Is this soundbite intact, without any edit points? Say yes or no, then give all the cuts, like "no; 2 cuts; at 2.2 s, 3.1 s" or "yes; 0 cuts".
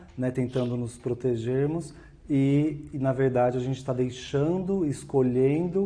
yes; 0 cuts